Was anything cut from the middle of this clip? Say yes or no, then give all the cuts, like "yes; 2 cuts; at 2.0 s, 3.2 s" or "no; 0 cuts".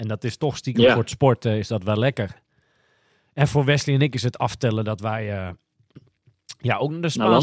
no; 0 cuts